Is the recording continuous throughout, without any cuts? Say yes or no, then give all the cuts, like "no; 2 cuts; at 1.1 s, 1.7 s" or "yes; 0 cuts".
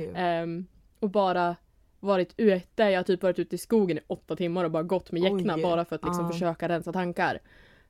yes; 0 cuts